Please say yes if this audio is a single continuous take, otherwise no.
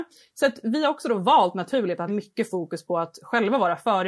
no